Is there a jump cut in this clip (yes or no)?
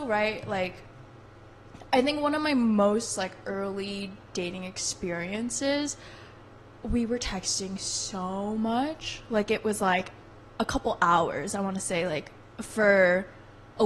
no